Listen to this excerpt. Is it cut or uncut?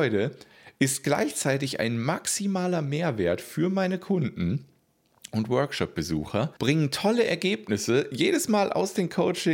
cut